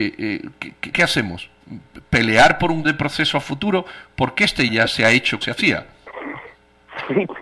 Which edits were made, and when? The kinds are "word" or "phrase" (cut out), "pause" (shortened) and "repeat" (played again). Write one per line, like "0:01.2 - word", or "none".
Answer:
0:00.9 - word
0:02.8 - word
0:04.7 - word
0:05.4 - word